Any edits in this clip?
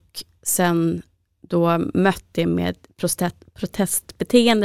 no; 0 cuts

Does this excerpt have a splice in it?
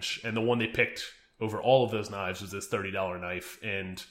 no; 0 cuts

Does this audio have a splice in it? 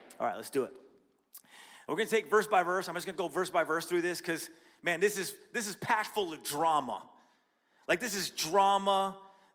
no; 0 cuts

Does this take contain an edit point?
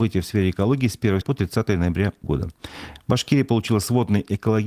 yes; 2 cuts; at 1.2 s, 2.2 s

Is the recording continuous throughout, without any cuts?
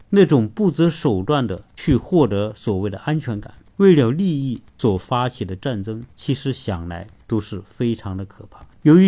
no; 1 cut; at 6.1 s

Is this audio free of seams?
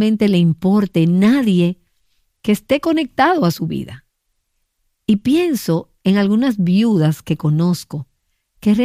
yes; 0 cuts

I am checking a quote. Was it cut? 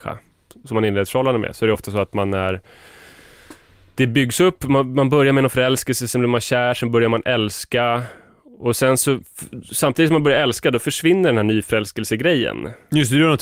no; 0 cuts

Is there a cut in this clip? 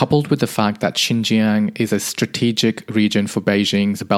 no; 0 cuts

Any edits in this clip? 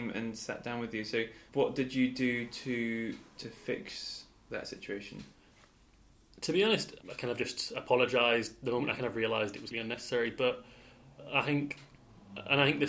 yes; 4 cuts; at 1.5 s, 3.4 s, 7.0 s, 9.7 s

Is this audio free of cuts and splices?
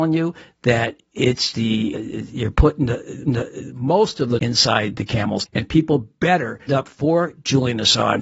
no; 6 cuts; at 1.5 s, 1.9 s, 3.2 s, 4.4 s, 5.5 s, 6.7 s

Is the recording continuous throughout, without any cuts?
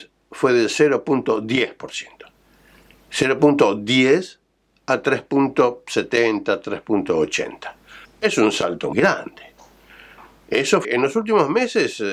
no; 3 cuts; at 8.0 s, 8.9 s, 10.8 s

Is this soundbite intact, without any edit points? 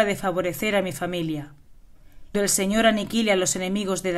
no; 1 cut; at 2.3 s

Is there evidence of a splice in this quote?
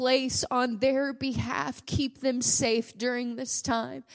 yes; 1 cut; at 1.8 s

